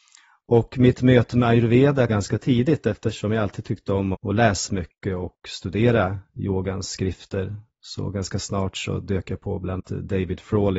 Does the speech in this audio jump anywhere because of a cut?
yes; 4 cuts; at 2.1 s, 4.1 s, 4.7 s, 9.8 s

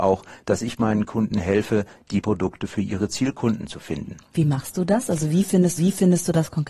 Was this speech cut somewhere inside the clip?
yes; 2 cuts; at 2.2 s, 5.8 s

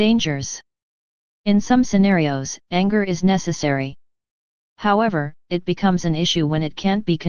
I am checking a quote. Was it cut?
yes; 2 cuts; at 2.6 s, 5.4 s

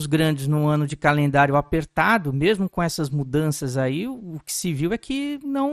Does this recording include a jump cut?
no; 0 cuts

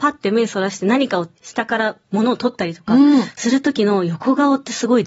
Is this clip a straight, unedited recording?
no; 1 cut; at 1.4 s

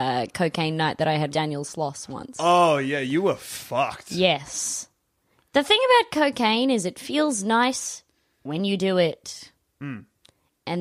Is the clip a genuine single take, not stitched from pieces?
no; 1 cut; at 1.3 s

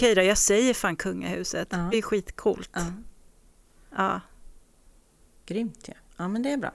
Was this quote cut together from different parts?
yes; 1 cut; at 1.9 s

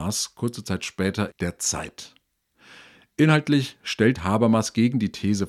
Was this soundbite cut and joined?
yes; 2 cuts; at 1.3 s, 4.2 s

